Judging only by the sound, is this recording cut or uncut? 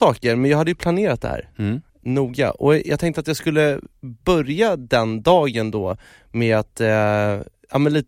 cut